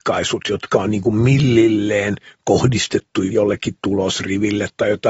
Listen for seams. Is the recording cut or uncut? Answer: uncut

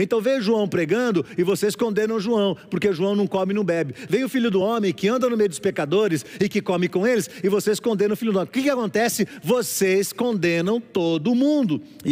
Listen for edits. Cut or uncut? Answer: uncut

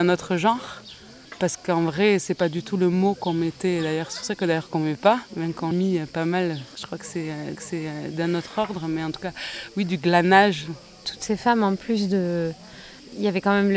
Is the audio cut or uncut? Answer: cut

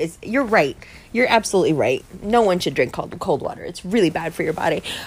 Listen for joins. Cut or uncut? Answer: uncut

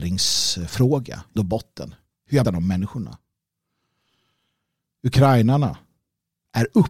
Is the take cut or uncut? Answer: cut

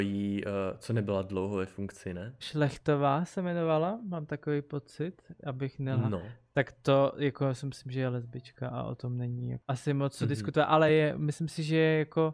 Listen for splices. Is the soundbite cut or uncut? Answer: uncut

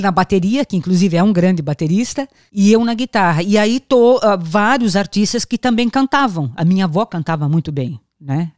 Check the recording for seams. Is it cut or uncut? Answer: uncut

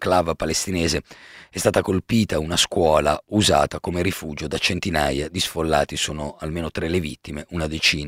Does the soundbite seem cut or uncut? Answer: uncut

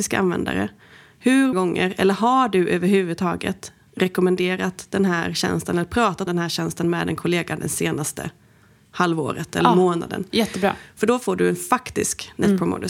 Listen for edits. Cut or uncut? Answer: cut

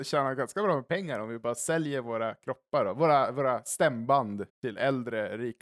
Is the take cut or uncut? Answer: cut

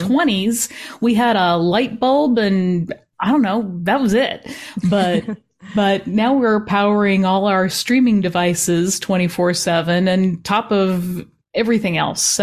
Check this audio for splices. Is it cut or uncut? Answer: uncut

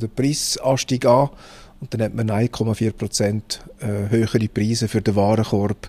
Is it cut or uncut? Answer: uncut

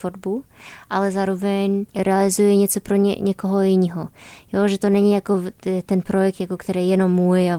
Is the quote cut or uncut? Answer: uncut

